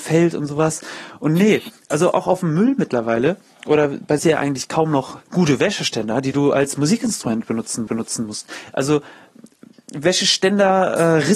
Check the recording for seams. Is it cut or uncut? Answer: cut